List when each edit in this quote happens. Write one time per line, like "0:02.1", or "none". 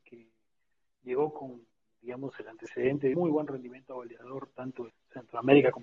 0:03.1
0:04.9